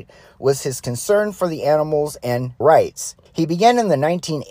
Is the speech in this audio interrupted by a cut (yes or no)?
yes